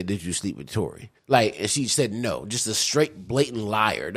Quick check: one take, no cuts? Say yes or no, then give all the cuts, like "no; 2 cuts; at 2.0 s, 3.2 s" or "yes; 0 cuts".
no; 1 cut; at 1.2 s